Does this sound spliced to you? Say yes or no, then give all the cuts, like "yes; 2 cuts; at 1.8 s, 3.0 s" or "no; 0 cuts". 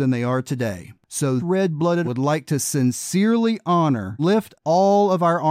yes; 4 cuts; at 1.4 s, 2.0 s, 4.2 s, 4.5 s